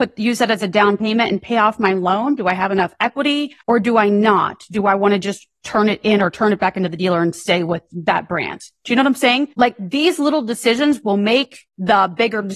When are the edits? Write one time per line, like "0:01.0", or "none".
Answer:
0:03.6
0:09.5

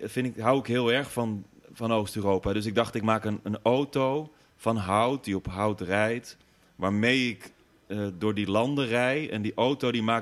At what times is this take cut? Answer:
none

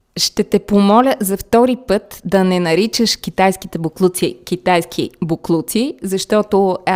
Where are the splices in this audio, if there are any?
none

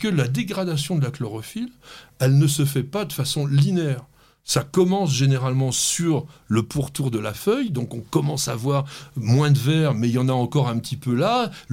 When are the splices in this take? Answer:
none

